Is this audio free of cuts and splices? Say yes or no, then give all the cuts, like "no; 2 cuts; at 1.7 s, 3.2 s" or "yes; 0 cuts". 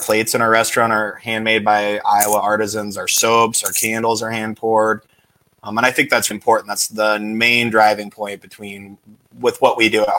no; 1 cut; at 6.3 s